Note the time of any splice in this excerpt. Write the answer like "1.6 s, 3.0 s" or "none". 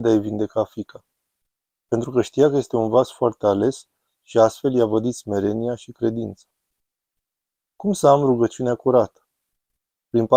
none